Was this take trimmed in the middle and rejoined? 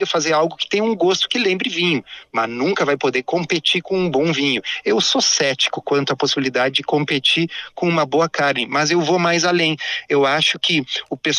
no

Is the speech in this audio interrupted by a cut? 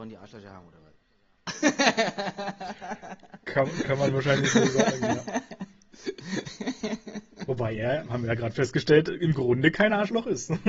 no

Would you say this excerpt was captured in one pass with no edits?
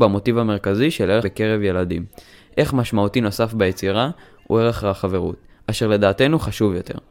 no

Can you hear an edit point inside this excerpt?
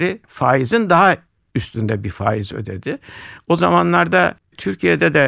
no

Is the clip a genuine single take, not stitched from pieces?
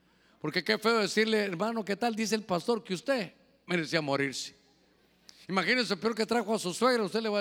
yes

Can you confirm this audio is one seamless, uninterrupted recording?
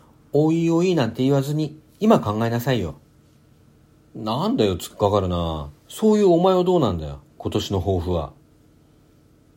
no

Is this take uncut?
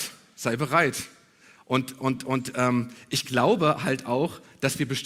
yes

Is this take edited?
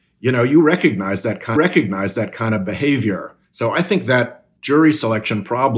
yes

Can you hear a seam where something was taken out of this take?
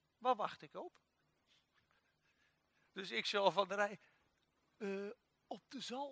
no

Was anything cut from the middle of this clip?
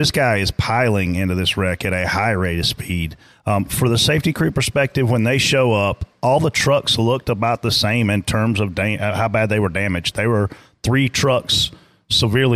no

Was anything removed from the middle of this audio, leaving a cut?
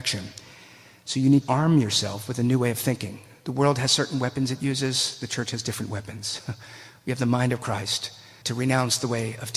yes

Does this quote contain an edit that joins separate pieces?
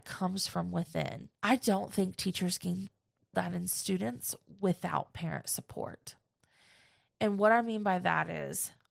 yes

